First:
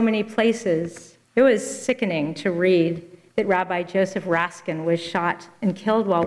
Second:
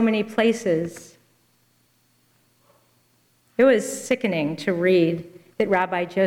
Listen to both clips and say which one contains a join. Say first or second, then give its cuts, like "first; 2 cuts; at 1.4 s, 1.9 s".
first; 1 cut; at 1.2 s